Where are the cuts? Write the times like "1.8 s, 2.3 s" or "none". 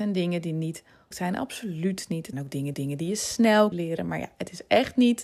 1.1 s, 2.3 s, 2.7 s, 3.7 s